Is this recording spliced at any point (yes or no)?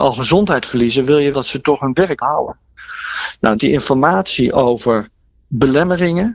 yes